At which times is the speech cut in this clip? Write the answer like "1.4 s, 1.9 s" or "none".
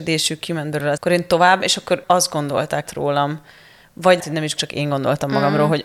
1.0 s, 1.6 s, 2.0 s, 2.8 s, 4.2 s, 4.6 s